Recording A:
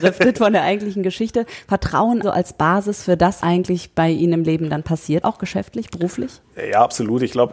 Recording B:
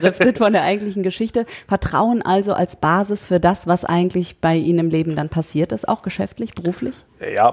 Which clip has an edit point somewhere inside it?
A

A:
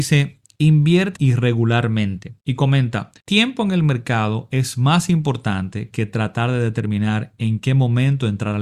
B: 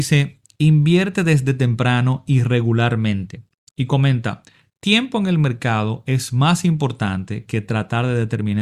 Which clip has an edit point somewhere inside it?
A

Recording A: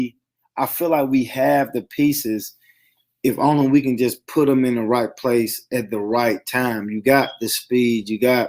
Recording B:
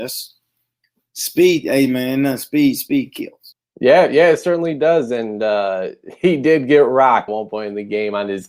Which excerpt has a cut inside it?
B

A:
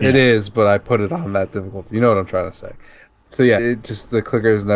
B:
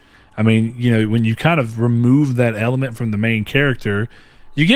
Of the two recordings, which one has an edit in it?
A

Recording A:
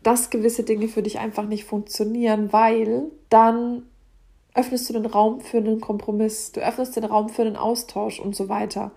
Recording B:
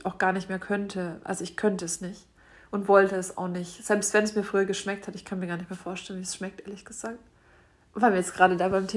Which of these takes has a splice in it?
A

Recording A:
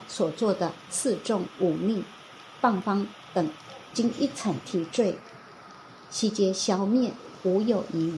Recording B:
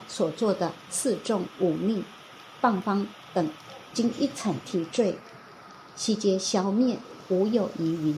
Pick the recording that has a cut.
B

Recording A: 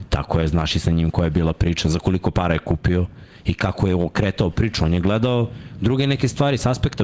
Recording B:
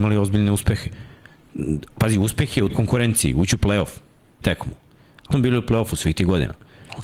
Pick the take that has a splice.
B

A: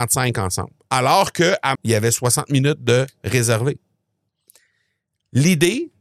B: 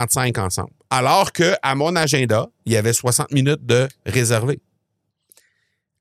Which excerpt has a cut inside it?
A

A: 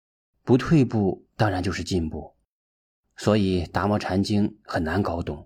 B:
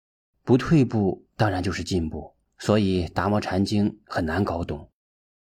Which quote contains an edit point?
B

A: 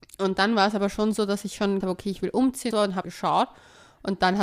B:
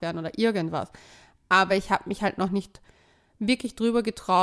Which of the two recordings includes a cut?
A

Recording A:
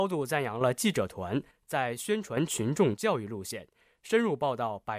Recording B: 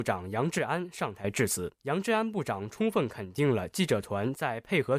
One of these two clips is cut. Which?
B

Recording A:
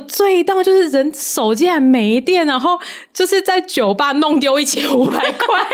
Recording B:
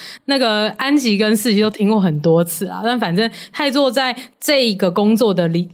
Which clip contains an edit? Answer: B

